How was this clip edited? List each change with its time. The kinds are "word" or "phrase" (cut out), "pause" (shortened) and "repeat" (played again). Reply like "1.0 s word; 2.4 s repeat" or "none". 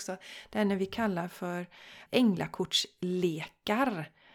2.1 s word